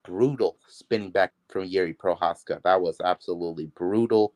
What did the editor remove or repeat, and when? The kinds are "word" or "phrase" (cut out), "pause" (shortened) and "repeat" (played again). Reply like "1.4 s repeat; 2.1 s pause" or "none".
1.3 s word